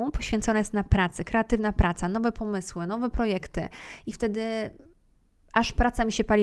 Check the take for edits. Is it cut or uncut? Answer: uncut